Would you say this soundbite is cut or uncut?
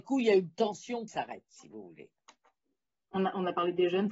cut